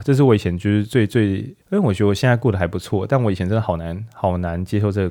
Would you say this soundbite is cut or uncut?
cut